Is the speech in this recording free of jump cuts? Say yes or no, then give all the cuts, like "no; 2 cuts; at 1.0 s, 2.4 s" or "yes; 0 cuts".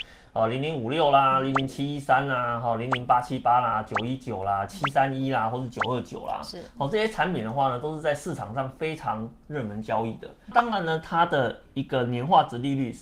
yes; 0 cuts